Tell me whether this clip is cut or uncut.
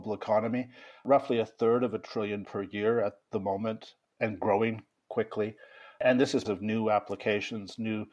cut